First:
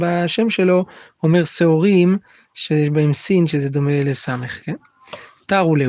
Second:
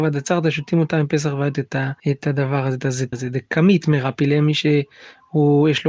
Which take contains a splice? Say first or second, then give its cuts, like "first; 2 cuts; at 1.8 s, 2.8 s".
second; 3 cuts; at 1.5 s, 2.0 s, 3.1 s